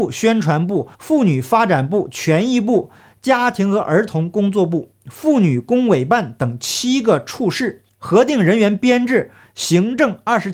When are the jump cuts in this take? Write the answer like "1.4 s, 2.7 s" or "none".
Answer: 0.9 s